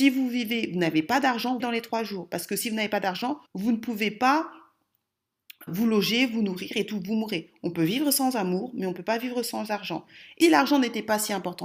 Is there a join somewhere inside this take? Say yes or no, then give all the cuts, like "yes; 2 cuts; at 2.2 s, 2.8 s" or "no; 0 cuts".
yes; 4 cuts; at 1.6 s, 3.5 s, 5.7 s, 10.4 s